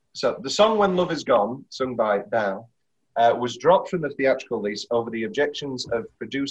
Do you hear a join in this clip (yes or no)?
no